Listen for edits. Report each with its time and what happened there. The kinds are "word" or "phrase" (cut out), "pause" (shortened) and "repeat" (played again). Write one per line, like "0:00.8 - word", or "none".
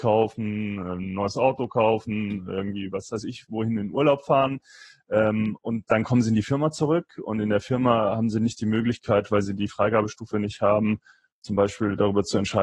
none